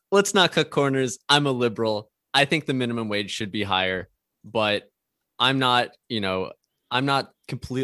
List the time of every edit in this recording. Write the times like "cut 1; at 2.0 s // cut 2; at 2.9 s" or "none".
none